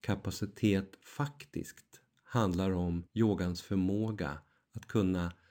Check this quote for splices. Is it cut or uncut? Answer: cut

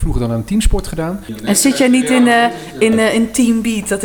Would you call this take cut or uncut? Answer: uncut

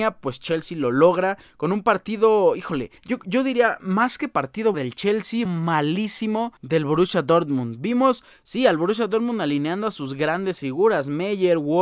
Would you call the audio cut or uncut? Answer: cut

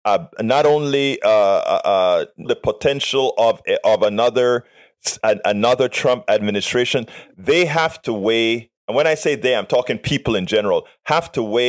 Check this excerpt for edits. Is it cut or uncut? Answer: cut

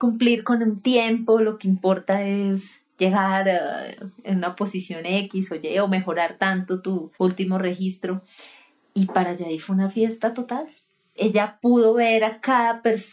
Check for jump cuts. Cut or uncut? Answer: cut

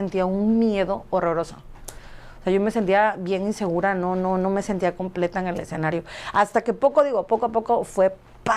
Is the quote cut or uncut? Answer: uncut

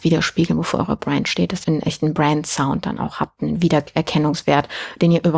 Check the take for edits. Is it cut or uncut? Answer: uncut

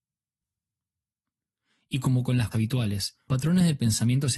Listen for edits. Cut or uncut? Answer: cut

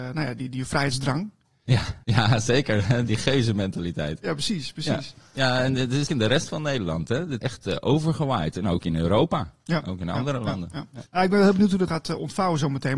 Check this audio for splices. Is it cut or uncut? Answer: cut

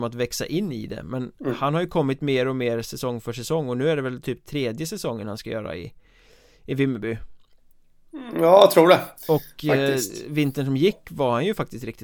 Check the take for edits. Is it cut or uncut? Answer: uncut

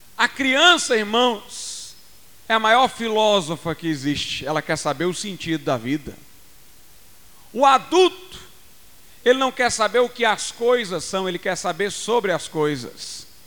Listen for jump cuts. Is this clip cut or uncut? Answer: uncut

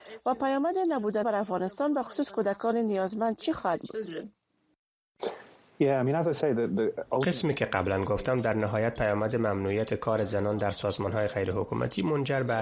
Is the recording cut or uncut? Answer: cut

